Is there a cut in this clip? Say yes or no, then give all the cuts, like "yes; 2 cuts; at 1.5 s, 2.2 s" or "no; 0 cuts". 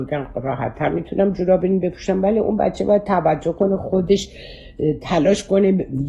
no; 0 cuts